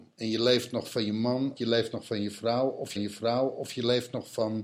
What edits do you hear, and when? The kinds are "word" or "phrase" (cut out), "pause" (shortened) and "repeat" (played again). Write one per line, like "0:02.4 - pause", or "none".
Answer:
0:01.6 - word
0:03.0 - repeat